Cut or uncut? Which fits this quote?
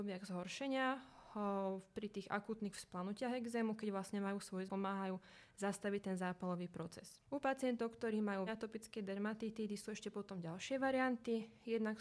cut